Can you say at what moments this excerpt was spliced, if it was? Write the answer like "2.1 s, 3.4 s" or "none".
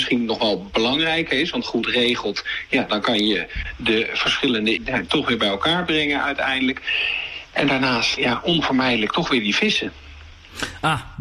1.6 s, 4.8 s, 8.2 s

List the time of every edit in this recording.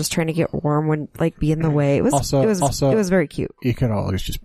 2.6 s

